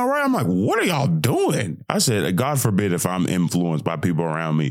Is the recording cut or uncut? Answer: uncut